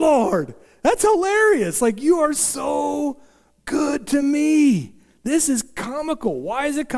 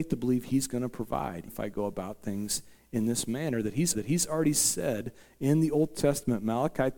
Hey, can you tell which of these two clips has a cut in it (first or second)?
second